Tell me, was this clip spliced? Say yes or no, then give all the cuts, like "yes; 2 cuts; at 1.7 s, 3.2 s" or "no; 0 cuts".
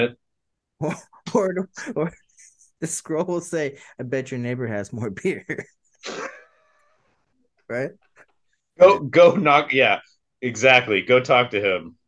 no; 0 cuts